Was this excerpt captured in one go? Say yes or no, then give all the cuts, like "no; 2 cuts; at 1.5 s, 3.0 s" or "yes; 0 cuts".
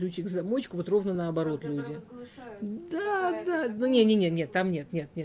yes; 0 cuts